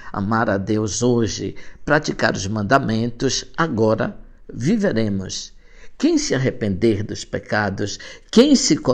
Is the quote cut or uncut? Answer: uncut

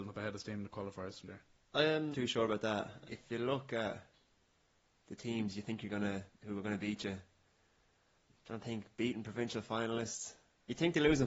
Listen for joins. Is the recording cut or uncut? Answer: cut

